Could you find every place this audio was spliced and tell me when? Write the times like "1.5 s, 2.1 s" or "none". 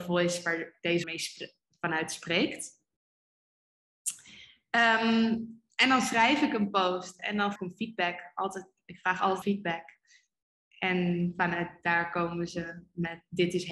1.0 s, 7.6 s, 9.4 s